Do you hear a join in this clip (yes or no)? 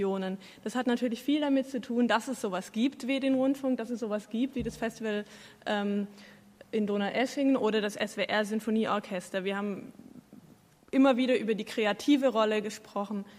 no